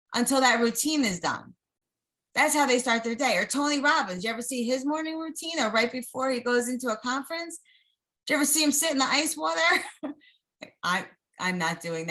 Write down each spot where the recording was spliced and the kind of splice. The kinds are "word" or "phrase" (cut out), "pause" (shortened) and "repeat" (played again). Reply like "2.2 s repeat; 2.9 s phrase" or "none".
2.1 s pause